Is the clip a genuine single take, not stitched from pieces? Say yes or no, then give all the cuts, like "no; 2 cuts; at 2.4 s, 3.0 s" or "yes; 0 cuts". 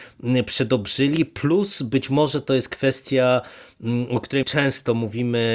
no; 1 cut; at 4.4 s